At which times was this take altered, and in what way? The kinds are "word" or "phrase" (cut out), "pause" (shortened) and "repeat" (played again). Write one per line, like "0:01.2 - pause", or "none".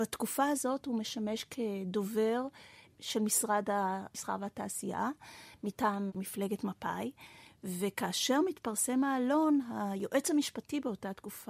none